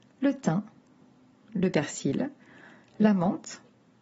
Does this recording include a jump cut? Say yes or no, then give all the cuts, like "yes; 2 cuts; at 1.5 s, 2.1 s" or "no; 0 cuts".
no; 0 cuts